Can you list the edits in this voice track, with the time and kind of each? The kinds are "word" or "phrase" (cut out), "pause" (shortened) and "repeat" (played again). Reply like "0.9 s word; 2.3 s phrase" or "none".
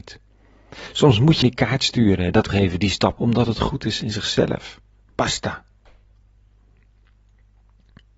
1.4 s word; 2.5 s word; 3.1 s word